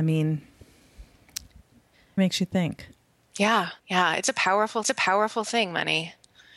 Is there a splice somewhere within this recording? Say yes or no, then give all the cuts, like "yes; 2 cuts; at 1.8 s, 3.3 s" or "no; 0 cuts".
yes; 3 cuts; at 2.2 s, 3.8 s, 4.8 s